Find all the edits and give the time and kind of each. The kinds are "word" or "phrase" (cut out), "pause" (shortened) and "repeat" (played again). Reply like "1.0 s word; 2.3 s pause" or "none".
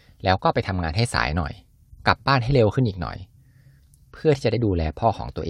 none